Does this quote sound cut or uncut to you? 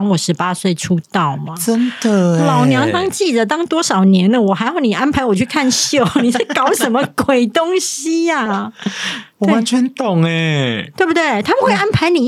uncut